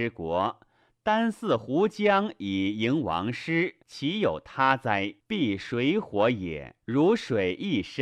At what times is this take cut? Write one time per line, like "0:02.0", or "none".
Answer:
0:03.8
0:05.2
0:06.8